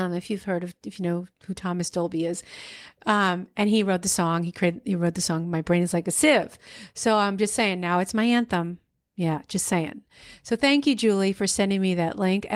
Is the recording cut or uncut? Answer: uncut